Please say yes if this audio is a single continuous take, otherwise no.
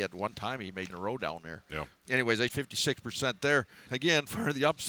no